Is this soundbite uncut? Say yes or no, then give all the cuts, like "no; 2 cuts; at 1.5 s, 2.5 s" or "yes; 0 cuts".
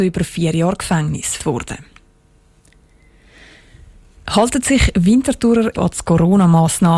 no; 2 cuts; at 1.4 s, 5.7 s